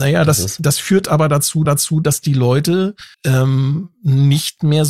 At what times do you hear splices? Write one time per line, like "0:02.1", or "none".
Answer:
0:01.6
0:03.1